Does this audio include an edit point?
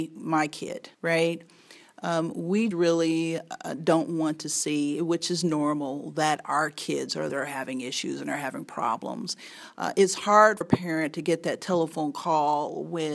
yes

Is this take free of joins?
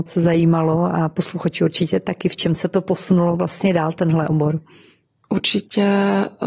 yes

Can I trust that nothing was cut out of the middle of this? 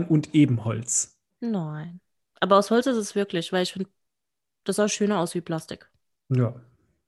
yes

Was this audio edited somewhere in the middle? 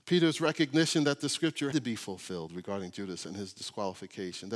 yes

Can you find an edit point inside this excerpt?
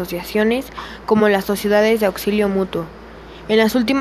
no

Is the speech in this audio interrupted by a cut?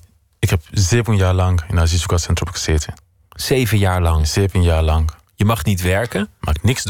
no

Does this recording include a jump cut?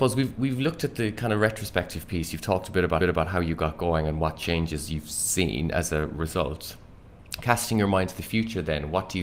yes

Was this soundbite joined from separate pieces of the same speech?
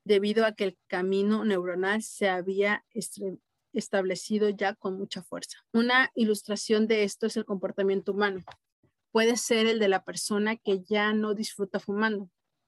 yes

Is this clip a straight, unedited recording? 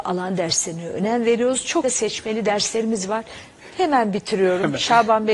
no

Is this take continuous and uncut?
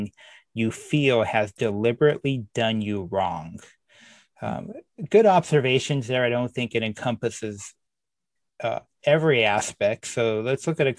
yes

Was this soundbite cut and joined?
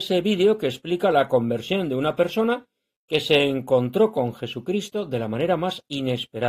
no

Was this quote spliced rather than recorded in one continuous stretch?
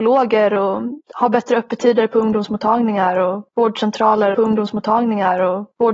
yes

